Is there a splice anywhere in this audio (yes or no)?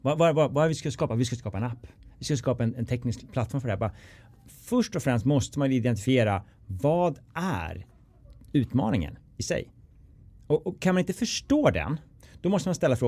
no